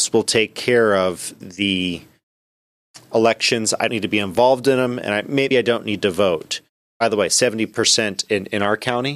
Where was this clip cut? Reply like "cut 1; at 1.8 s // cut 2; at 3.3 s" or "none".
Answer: cut 1; at 1.4 s // cut 2; at 3.9 s // cut 3; at 5.5 s

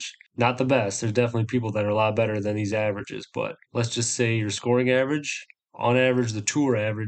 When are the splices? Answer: none

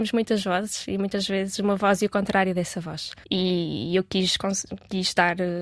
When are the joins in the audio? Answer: cut 1; at 3.2 s

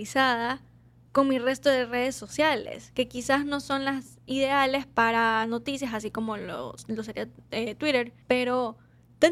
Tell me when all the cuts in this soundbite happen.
cut 1; at 8.2 s

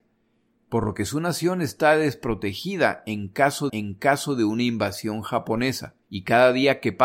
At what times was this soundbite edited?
cut 1; at 3.7 s // cut 2; at 6.0 s

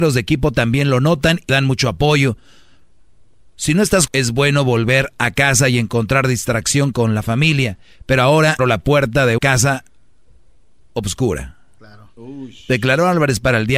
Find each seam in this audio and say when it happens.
cut 1; at 1.5 s // cut 2; at 4.1 s // cut 3; at 8.6 s // cut 4; at 9.4 s

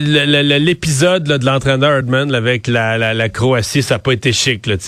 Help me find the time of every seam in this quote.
none

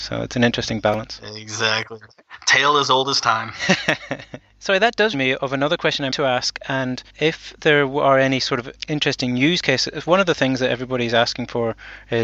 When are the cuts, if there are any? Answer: cut 1; at 5.1 s // cut 2; at 6.1 s // cut 3; at 7.1 s

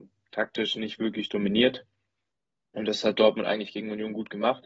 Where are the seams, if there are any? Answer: none

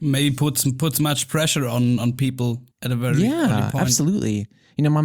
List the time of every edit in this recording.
cut 1; at 2.7 s

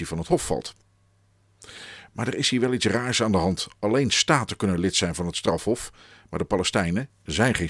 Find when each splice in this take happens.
none

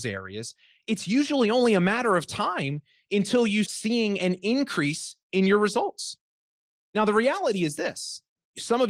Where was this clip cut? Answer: cut 1; at 3.6 s

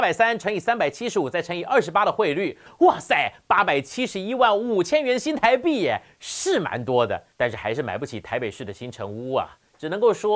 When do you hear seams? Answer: cut 1; at 7.3 s

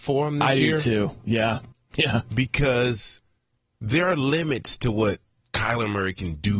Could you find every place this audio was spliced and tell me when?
cut 1; at 1.7 s // cut 2; at 3.6 s

